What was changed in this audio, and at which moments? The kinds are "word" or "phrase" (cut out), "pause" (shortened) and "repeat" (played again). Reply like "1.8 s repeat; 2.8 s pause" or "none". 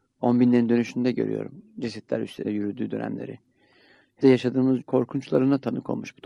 2.4 s word; 4.2 s word; 4.8 s word